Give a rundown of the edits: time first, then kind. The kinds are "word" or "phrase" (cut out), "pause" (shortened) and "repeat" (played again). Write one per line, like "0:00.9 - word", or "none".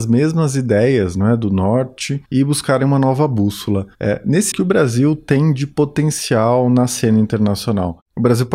0:04.5 - phrase